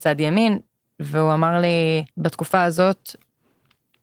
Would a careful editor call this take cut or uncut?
cut